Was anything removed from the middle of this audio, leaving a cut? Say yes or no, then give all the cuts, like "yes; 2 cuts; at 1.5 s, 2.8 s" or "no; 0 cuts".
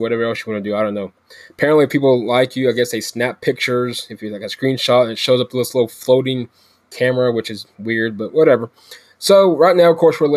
no; 0 cuts